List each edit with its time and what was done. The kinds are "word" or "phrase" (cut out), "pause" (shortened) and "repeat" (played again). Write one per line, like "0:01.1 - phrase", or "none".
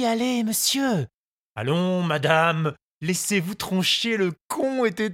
none